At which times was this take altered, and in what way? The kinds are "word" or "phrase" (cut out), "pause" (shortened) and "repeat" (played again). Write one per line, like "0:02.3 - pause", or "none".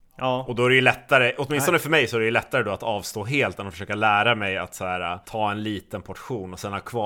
0:05.2 - pause